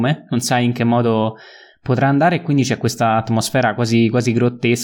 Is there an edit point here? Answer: no; 0 cuts

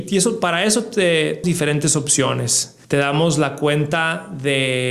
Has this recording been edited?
yes; 2 cuts; at 1.4 s, 2.8 s

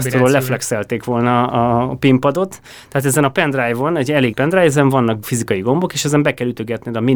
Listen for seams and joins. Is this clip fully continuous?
no; 3 cuts; at 1.5 s, 4.3 s, 5.2 s

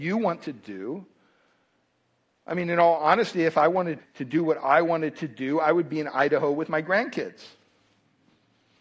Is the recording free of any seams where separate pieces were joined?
no; 1 cut; at 4.0 s

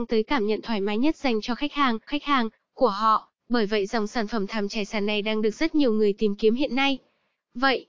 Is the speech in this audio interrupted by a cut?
yes; 2 cuts; at 2.1 s, 3.4 s

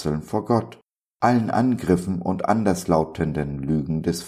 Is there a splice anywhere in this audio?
yes; 1 cut; at 0.9 s

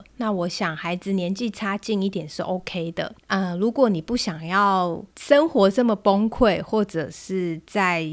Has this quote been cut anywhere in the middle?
yes; 2 cuts; at 3.2 s, 5.1 s

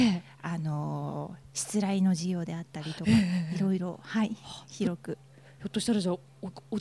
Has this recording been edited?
no; 0 cuts

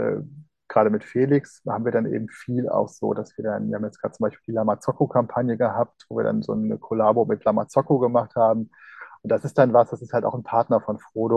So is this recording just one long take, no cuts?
yes; 0 cuts

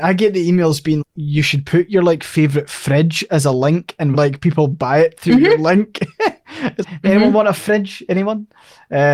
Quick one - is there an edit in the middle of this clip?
yes; 3 cuts; at 1.0 s, 4.1 s, 6.8 s

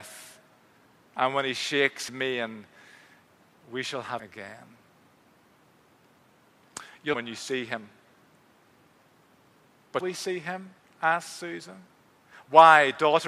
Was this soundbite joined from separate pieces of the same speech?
yes; 4 cuts; at 2.1 s, 4.2 s, 7.1 s, 10.0 s

